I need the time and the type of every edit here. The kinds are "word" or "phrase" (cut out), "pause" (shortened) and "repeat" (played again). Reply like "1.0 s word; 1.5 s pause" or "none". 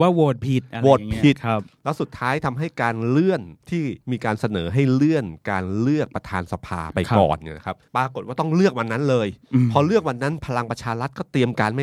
3.6 s pause; 4.0 s pause; 7.9 s pause